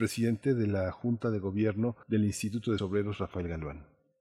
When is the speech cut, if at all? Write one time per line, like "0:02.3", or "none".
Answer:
0:02.0
0:02.8